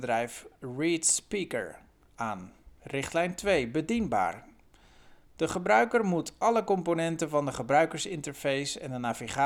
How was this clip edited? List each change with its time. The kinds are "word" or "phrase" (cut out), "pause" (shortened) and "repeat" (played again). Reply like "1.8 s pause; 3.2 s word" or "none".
2.8 s pause; 5.2 s pause

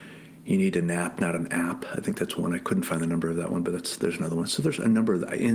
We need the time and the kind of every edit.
none

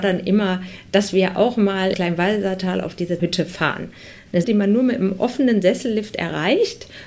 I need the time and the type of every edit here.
1.9 s word; 3.2 s word; 4.4 s word

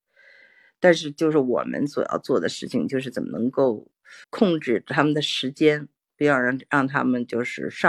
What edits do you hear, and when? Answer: 4.2 s pause

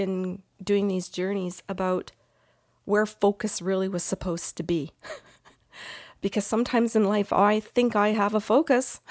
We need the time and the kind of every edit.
none

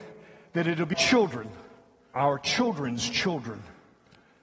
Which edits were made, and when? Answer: 0.9 s word; 2.2 s word

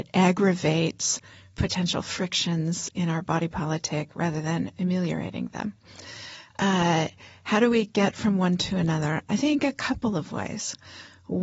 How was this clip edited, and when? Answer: none

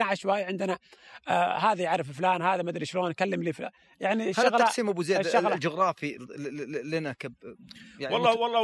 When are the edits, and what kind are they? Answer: none

